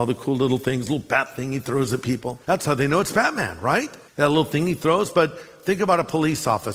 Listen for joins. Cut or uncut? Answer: cut